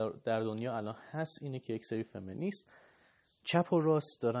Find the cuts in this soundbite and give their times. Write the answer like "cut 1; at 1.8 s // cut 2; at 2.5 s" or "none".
none